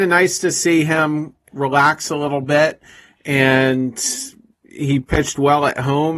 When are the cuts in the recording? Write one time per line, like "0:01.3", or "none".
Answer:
none